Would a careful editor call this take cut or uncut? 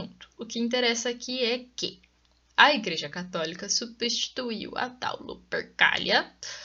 uncut